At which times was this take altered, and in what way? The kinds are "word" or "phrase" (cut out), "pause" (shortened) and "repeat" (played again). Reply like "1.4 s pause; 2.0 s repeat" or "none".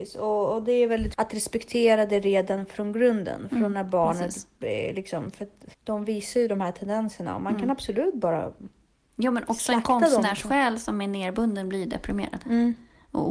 1.1 s word; 5.7 s pause